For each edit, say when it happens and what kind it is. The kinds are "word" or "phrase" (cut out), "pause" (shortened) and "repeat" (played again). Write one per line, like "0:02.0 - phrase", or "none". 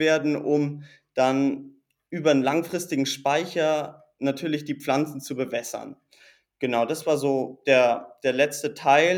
none